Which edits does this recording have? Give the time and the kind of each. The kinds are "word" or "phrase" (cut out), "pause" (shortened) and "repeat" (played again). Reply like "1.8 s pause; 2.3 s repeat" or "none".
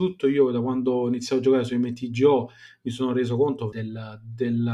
3.7 s word